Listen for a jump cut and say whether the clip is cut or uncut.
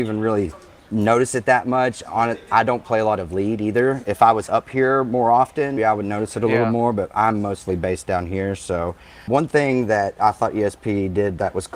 cut